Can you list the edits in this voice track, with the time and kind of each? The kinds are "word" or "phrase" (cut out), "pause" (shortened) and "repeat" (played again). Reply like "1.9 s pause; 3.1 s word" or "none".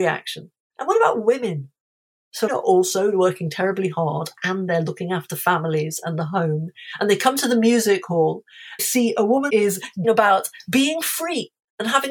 2.5 s word; 8.8 s phrase; 9.5 s phrase; 10.0 s word